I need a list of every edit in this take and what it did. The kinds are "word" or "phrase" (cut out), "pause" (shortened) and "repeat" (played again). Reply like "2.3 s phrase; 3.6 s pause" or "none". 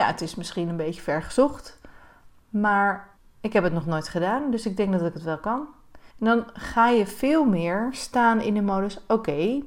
3.2 s pause; 6.1 s pause